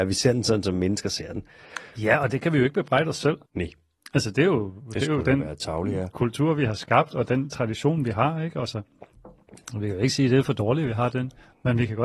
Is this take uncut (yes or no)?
no